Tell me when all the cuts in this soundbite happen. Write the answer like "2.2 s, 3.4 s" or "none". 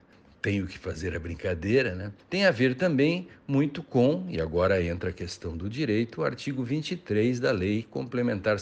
none